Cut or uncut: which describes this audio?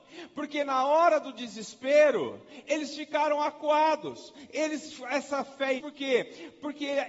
cut